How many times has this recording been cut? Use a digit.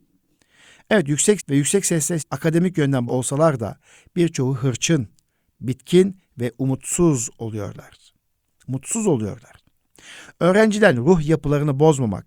3